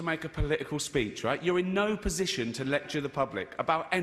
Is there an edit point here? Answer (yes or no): no